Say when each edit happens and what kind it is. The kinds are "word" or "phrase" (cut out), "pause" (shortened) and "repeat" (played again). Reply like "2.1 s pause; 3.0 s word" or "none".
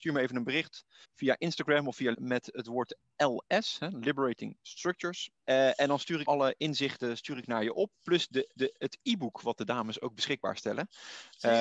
1.0 s pause; 2.1 s word; 5.4 s pause; 6.2 s word; 8.5 s repeat